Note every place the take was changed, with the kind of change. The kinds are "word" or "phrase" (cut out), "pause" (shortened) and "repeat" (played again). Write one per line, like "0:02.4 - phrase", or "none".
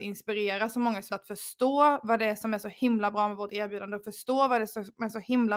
0:01.1 - word